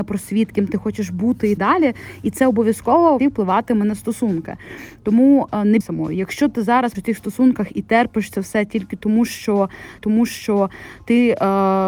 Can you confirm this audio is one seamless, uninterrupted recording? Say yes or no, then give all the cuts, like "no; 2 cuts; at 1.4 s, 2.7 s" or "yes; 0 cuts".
no; 5 cuts; at 1.6 s, 3.2 s, 5.8 s, 6.9 s, 10.0 s